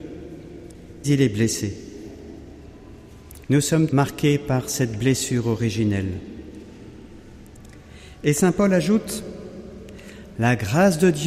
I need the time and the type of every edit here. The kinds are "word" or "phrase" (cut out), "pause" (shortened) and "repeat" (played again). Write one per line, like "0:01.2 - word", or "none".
0:01.0 - word
0:03.9 - word